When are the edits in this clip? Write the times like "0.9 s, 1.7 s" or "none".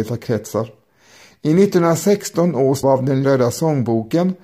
2.8 s, 3.2 s